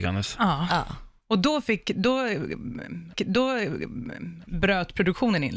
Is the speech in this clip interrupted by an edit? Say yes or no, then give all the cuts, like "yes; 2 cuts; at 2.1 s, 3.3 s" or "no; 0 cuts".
yes; 1 cut; at 3.1 s